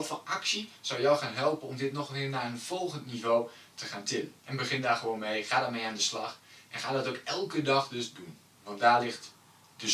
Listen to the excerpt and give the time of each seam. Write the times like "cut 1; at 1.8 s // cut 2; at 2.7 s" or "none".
cut 1; at 4.4 s

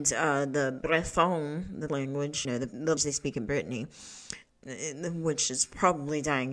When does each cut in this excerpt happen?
cut 1; at 1.9 s // cut 2; at 2.4 s // cut 3; at 3.0 s // cut 4; at 4.5 s

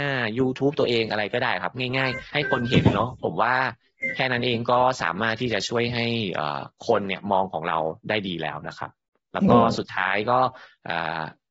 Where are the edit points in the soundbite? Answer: cut 1; at 2.3 s

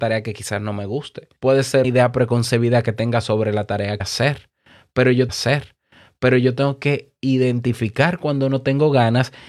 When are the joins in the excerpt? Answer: cut 1; at 1.4 s // cut 2; at 1.8 s // cut 3; at 4.0 s // cut 4; at 5.3 s

